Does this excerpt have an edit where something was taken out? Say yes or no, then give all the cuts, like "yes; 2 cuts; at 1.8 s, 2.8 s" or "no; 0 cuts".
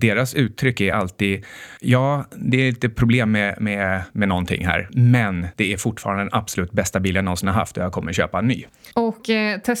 no; 0 cuts